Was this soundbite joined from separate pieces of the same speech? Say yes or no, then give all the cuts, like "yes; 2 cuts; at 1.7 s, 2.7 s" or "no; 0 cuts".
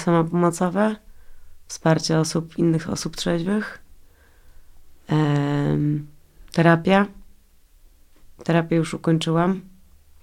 no; 0 cuts